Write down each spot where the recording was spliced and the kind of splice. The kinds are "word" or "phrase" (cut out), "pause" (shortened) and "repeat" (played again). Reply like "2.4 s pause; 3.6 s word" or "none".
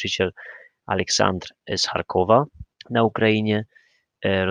2.7 s pause

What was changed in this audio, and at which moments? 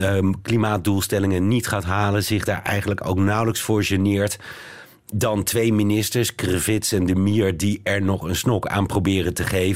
none

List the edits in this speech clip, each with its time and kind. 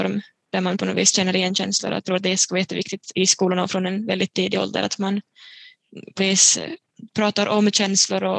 2.0 s word; 6.2 s word

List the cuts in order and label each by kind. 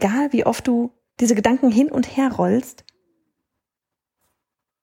none

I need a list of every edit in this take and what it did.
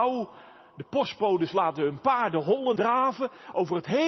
2.8 s word

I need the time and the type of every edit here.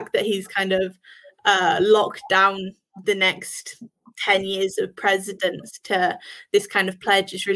none

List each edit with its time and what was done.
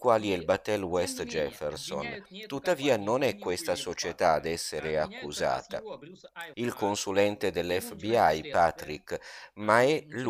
6.5 s word

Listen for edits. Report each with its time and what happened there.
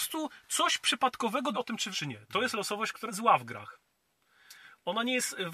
1.5 s word; 1.9 s word; 3.1 s word

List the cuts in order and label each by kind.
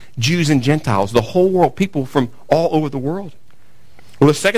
none

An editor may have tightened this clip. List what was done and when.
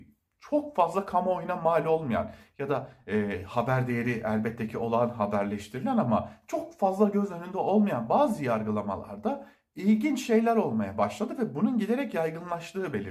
none

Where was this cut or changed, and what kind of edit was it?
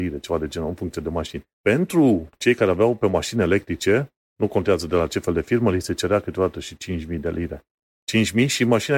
1.5 s pause

